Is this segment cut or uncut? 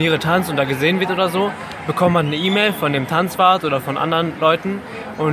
uncut